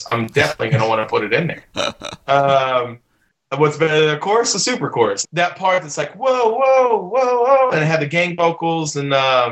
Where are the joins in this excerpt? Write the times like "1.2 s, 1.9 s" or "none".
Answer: 5.3 s